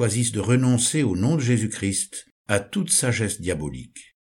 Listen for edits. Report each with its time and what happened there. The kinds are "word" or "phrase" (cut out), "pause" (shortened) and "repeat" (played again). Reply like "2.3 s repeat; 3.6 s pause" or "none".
2.4 s pause